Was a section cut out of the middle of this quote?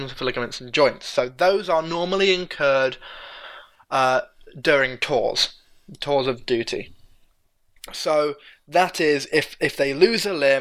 no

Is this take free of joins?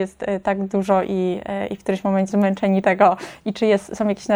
no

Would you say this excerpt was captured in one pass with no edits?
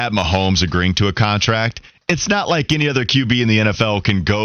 yes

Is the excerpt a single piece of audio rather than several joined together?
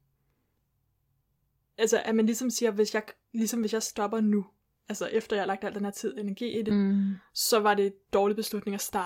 yes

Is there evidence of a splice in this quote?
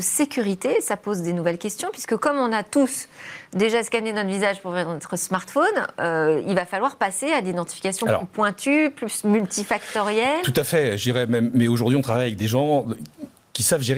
no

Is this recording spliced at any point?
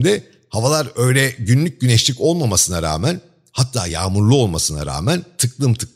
no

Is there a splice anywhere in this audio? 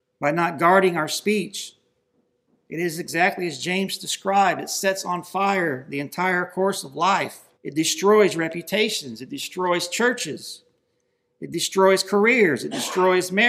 yes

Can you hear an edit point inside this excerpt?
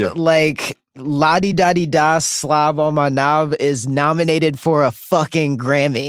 no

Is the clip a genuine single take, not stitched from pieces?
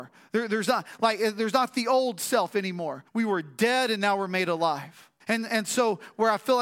no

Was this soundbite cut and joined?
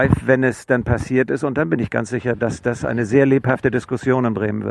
no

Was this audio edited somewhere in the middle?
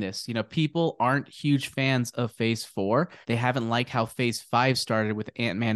yes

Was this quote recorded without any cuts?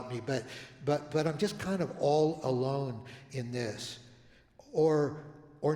yes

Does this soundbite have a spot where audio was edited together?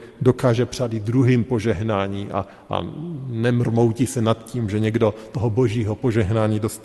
no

